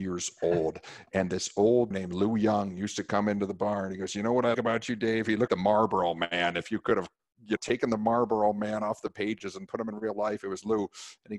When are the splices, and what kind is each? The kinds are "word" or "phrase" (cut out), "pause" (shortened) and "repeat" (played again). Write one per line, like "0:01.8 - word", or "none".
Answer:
0:01.9 - word
0:04.5 - word
0:05.5 - word
0:07.6 - word